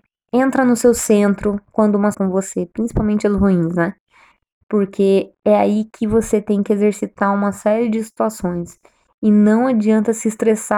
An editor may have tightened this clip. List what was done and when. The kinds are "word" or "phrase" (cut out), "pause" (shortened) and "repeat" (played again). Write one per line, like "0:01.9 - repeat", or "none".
0:02.1 - phrase